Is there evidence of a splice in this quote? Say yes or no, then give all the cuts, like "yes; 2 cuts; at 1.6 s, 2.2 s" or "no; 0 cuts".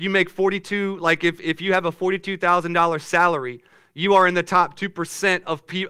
no; 0 cuts